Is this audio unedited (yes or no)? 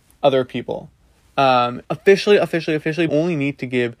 no